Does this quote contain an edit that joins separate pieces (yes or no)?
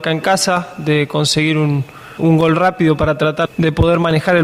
yes